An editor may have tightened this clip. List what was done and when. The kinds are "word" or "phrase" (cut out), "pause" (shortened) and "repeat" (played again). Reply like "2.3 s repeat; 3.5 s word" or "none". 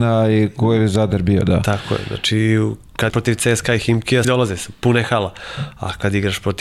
3.1 s word; 4.2 s word